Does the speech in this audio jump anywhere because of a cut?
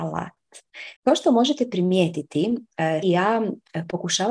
yes; 2 cuts; at 1.0 s, 3.0 s

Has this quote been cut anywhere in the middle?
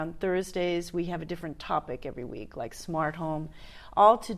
no; 0 cuts

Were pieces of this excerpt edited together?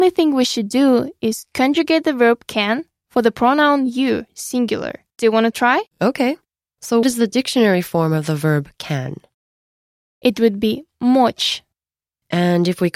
yes; 3 cuts; at 5.1 s, 5.9 s, 7.0 s

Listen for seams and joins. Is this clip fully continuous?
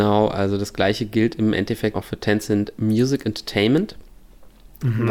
no; 1 cut; at 1.9 s

